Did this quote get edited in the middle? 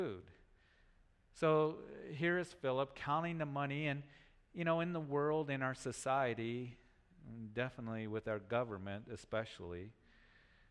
no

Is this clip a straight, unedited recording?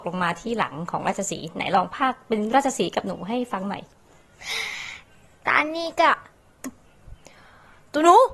yes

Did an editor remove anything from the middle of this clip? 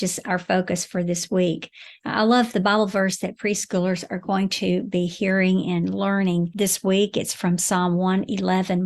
no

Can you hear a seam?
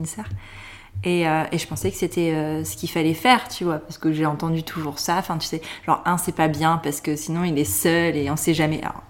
no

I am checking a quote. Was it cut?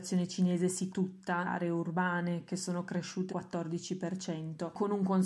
yes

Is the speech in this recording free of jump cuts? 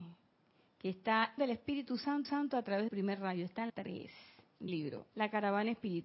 no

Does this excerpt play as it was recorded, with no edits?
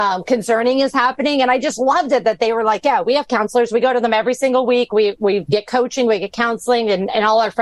yes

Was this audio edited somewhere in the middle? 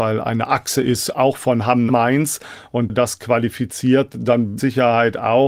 yes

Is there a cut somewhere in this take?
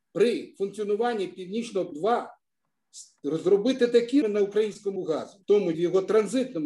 yes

